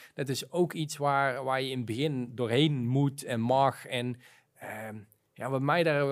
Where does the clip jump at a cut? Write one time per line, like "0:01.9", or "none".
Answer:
none